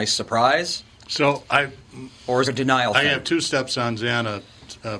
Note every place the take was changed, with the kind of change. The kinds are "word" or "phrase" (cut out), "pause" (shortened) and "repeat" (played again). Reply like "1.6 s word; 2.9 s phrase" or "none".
2.4 s phrase